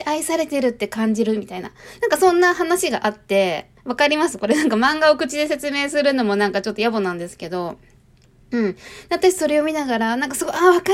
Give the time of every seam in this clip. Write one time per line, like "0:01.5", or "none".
0:03.8